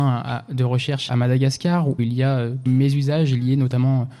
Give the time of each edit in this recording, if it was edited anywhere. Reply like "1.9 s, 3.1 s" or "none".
1.1 s, 2.0 s, 2.7 s